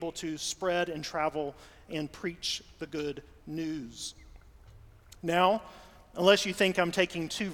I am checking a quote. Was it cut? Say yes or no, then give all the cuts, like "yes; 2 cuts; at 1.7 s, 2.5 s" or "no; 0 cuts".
no; 0 cuts